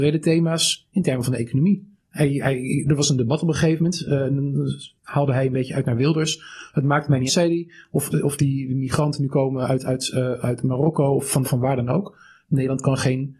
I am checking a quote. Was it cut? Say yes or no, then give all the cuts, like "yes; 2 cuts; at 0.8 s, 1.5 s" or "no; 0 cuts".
yes; 5 cuts; at 2.0 s, 5.0 s, 7.3 s, 8.1 s, 11.4 s